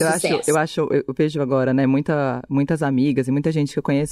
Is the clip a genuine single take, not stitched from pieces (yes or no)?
yes